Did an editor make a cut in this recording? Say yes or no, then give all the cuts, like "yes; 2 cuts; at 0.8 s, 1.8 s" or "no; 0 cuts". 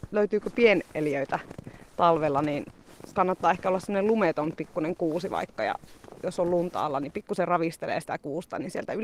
no; 0 cuts